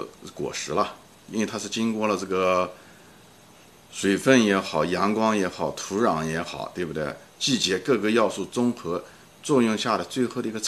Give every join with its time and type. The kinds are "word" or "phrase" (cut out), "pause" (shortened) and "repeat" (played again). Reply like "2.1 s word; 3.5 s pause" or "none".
none